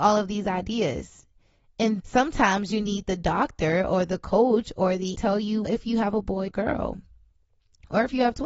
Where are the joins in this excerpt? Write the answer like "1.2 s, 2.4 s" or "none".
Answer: 2.0 s, 5.1 s, 5.6 s, 6.5 s

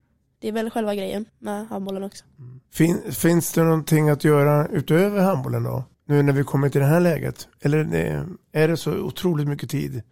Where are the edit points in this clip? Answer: 1.3 s, 2.7 s, 5.9 s

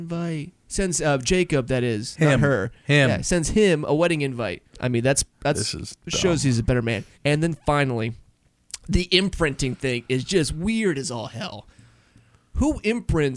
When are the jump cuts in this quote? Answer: 4.7 s, 7.1 s

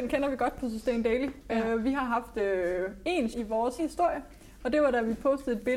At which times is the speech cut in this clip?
3.3 s, 3.8 s

